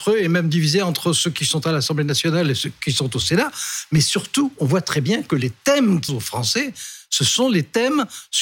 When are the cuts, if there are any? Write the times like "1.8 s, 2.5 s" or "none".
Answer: 6.1 s